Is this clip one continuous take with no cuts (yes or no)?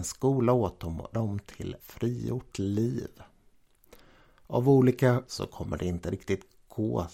no